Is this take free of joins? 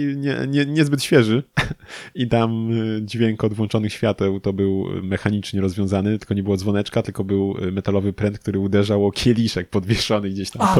yes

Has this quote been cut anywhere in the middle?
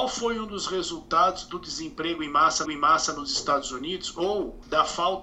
yes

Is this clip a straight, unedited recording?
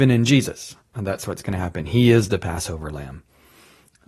yes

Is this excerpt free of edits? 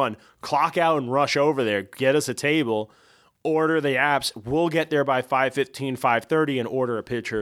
yes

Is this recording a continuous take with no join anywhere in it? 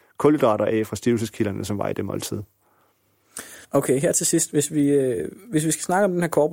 no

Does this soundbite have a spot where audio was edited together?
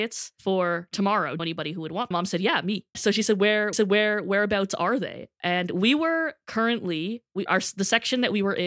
yes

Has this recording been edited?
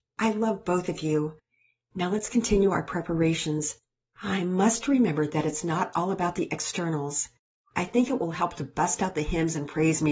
no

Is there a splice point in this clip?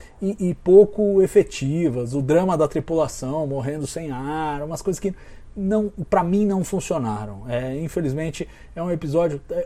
no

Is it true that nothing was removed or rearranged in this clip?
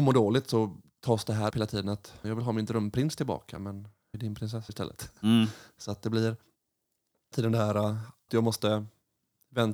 no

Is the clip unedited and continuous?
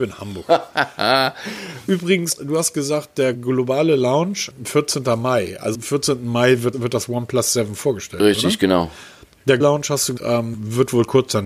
no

